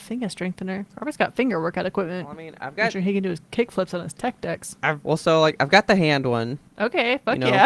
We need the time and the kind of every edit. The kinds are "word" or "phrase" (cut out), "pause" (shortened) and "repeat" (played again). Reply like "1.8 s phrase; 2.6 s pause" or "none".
0.9 s pause